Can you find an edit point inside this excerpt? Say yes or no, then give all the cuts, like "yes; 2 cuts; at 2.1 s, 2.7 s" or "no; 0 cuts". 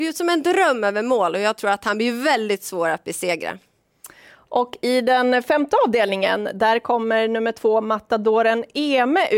no; 0 cuts